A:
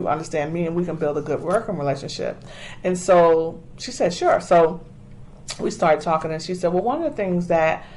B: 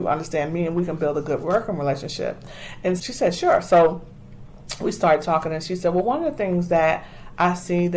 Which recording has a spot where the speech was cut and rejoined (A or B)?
B